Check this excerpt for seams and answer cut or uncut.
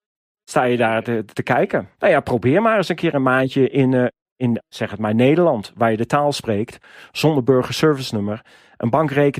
uncut